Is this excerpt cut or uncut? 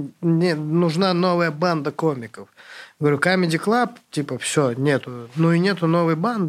uncut